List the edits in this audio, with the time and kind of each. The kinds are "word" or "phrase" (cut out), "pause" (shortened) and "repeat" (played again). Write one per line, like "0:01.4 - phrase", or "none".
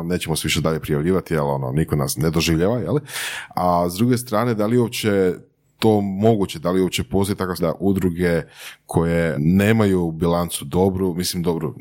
0:02.2 - word
0:07.6 - word
0:09.3 - word